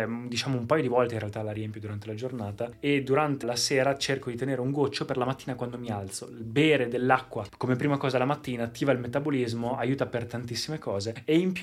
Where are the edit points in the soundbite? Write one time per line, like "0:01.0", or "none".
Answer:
0:03.4